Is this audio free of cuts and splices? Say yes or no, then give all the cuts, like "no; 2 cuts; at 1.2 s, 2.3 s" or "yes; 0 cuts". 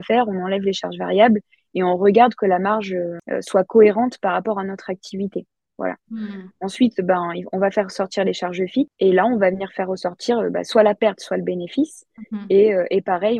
yes; 0 cuts